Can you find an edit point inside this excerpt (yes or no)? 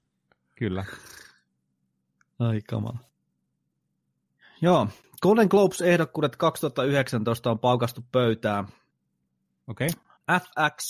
no